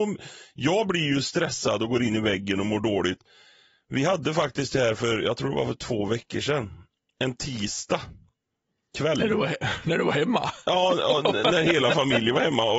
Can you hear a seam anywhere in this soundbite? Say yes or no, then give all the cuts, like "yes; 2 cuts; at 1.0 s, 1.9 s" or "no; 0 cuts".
no; 0 cuts